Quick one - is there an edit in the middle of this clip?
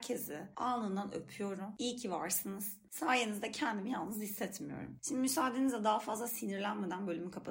no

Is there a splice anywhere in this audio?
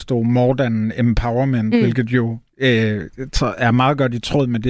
no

